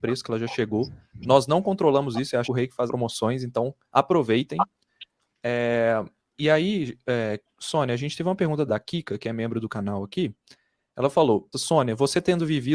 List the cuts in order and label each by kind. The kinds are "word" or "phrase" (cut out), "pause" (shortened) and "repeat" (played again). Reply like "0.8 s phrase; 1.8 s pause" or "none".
2.4 s word; 2.9 s word; 8.7 s word; 11.5 s word